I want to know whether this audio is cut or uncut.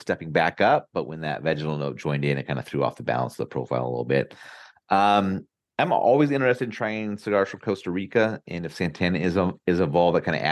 uncut